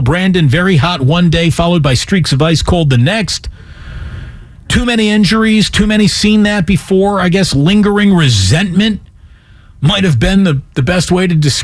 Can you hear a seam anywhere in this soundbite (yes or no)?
no